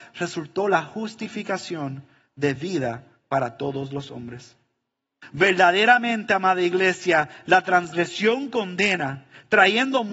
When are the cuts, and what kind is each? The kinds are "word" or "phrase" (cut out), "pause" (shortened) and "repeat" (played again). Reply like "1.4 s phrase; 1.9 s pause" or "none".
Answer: none